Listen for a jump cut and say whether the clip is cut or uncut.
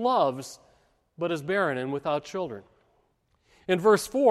uncut